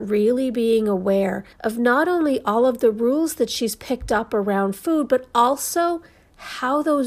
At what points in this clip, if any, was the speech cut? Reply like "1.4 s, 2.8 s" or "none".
1.5 s